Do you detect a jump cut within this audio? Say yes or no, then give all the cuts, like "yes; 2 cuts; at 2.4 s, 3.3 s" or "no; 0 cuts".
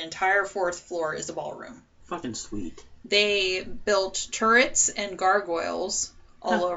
no; 0 cuts